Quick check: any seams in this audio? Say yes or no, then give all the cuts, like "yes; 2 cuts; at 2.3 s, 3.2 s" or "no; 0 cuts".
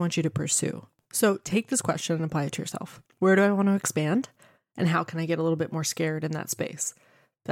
no; 0 cuts